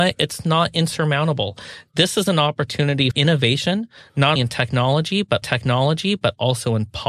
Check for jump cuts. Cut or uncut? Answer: cut